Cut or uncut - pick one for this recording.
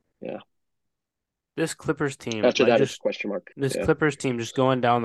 cut